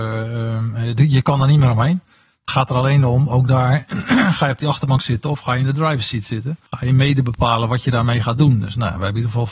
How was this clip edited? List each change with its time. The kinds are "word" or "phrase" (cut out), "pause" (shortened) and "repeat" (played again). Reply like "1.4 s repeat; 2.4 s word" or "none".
6.7 s pause